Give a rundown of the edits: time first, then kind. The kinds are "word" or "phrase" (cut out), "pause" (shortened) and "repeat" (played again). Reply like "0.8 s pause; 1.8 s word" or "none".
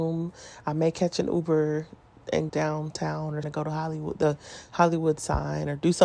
2.5 s word; 3.4 s word